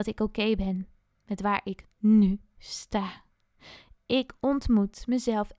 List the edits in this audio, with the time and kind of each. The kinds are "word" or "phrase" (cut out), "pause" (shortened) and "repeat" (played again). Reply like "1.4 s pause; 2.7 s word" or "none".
none